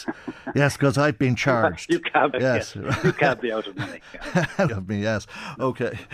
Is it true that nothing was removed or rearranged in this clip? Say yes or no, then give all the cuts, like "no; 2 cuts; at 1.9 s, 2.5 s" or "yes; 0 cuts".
no; 2 cuts; at 2.3 s, 4.7 s